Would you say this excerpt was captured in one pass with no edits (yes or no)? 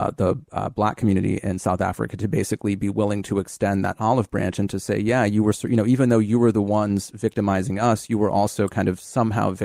yes